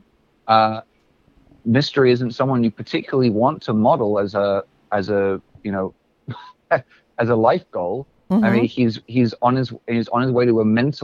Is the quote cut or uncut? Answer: uncut